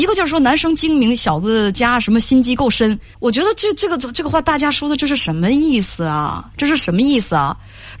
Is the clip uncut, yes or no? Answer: no